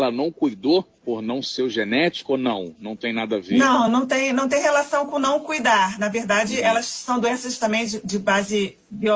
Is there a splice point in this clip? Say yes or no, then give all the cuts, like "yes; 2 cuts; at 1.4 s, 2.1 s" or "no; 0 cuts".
no; 0 cuts